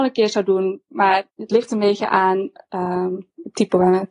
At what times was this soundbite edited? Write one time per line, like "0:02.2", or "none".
0:01.3